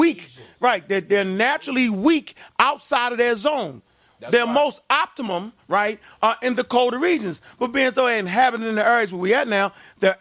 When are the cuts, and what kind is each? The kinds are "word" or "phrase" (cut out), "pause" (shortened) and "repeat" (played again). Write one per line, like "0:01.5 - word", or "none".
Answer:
none